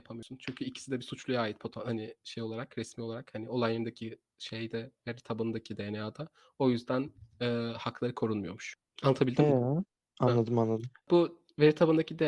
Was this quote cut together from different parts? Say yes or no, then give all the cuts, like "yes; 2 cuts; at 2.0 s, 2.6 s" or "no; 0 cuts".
no; 0 cuts